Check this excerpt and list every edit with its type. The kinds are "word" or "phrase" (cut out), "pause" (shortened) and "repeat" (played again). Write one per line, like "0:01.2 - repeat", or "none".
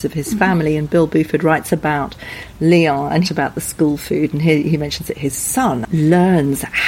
0:03.2 - phrase